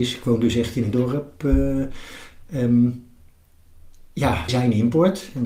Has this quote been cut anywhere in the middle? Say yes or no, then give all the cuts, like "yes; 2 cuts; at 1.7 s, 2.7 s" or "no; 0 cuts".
yes; 2 cuts; at 0.9 s, 4.5 s